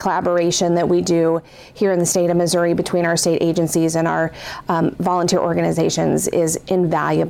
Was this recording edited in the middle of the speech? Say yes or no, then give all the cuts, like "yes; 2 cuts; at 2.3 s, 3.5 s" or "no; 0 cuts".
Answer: no; 0 cuts